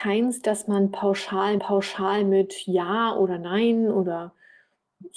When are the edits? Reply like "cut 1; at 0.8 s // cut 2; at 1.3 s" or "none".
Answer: cut 1; at 1.6 s